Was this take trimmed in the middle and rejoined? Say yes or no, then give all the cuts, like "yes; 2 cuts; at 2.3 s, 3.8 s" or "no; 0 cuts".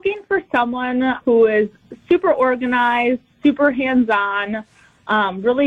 yes; 1 cut; at 1.2 s